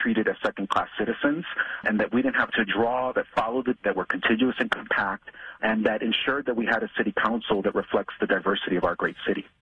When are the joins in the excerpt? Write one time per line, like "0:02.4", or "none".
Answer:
0:01.8
0:02.5
0:03.1
0:03.8